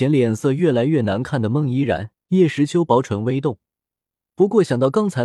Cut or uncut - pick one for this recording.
cut